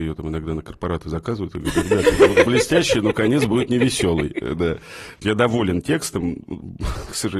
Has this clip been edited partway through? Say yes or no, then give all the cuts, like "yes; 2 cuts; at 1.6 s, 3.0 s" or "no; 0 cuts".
yes; 2 cuts; at 2.5 s, 5.2 s